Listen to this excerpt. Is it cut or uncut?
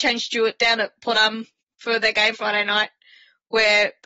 cut